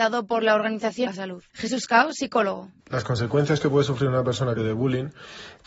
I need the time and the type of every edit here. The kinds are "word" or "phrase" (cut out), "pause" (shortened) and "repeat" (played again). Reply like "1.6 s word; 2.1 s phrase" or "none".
1.1 s phrase; 1.5 s pause; 2.8 s pause; 4.6 s word